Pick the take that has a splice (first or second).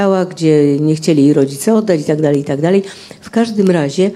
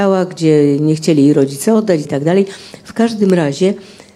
second